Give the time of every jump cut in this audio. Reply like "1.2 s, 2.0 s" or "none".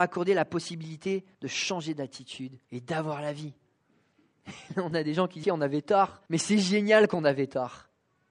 1.3 s, 2.6 s, 3.8 s, 5.4 s, 6.3 s